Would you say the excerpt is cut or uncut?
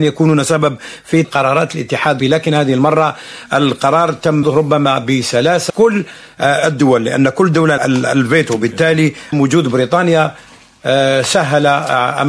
cut